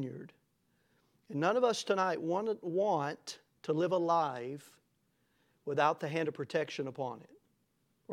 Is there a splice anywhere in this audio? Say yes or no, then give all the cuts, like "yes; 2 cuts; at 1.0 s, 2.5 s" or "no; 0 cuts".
no; 0 cuts